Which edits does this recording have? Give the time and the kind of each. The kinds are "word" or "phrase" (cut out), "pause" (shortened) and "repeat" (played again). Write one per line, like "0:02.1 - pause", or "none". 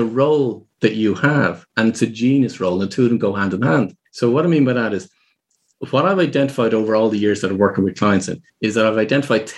0:04.1 - pause
0:08.5 - pause